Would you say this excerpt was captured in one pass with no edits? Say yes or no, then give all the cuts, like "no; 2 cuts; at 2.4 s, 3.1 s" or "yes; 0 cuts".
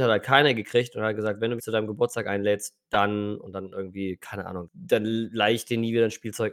no; 2 cuts; at 1.6 s, 4.7 s